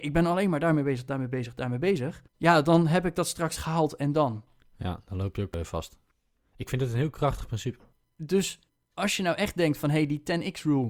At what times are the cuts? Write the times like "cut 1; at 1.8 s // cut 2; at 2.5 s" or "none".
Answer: cut 1; at 2.3 s